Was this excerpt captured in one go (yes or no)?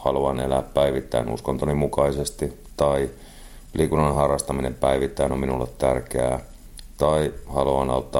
yes